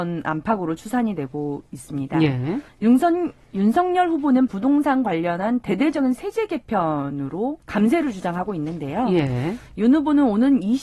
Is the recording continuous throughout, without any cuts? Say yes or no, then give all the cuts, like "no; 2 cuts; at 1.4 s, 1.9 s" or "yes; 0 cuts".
no; 3 cuts; at 2.7 s, 4.5 s, 7.6 s